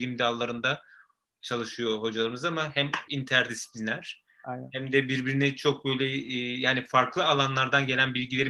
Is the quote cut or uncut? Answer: cut